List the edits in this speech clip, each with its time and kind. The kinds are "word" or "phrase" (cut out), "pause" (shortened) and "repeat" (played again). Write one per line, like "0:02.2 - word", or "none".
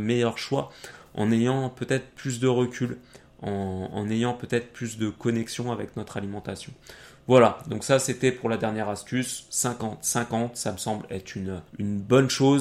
0:11.7 - pause